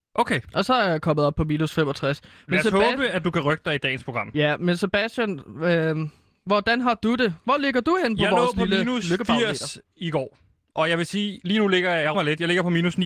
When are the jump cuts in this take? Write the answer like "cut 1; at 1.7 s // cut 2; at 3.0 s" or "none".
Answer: cut 1; at 12.1 s